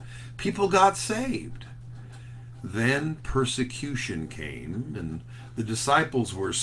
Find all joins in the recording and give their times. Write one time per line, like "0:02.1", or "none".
none